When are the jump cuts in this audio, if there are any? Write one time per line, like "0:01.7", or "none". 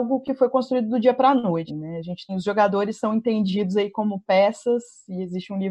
0:01.7
0:02.3